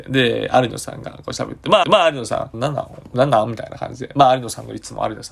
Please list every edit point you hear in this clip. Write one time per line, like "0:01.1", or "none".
0:01.8
0:02.5